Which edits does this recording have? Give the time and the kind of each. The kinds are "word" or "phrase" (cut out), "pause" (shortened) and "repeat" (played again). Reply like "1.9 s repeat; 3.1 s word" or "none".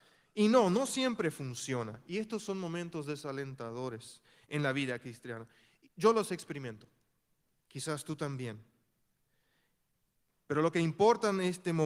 none